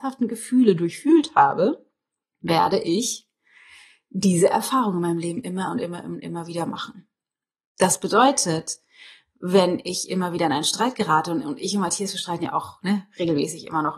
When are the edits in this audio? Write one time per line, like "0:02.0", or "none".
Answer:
none